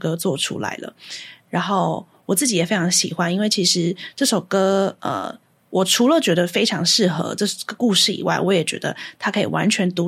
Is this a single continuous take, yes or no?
yes